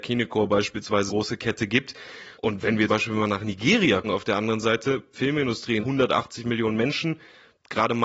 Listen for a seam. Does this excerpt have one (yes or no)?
yes